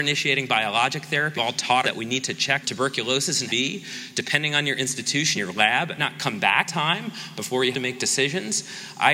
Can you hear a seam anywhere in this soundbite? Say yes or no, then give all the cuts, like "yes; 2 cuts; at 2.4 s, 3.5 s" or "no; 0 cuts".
yes; 8 cuts; at 1.4 s, 1.8 s, 2.6 s, 3.5 s, 5.4 s, 6.0 s, 6.7 s, 7.7 s